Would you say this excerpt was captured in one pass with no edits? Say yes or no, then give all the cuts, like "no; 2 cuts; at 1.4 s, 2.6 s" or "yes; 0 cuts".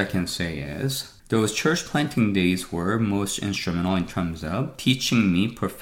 no; 1 cut; at 1.2 s